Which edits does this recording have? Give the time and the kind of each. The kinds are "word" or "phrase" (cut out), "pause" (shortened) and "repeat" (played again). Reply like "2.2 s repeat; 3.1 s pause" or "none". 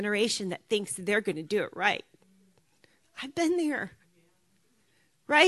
none